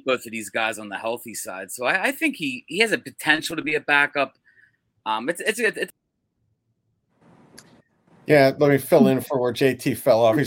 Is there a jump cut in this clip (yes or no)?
no